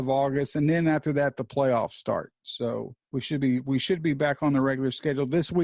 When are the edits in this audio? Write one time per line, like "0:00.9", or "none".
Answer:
0:03.0